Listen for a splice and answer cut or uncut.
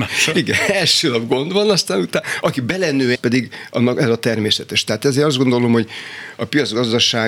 cut